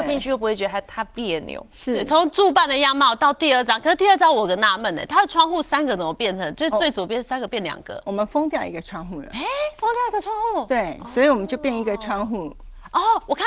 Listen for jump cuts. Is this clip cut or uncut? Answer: uncut